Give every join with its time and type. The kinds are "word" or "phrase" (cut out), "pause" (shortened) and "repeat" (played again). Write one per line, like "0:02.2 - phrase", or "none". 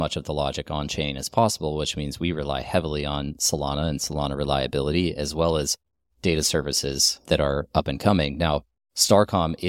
none